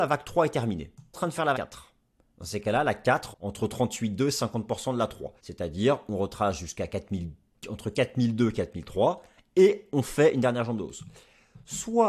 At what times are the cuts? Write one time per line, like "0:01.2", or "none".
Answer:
0:01.1
0:01.5
0:03.3
0:05.4